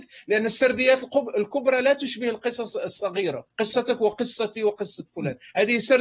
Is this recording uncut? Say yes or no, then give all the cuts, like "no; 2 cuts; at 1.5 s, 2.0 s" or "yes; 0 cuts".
no; 1 cut; at 3.5 s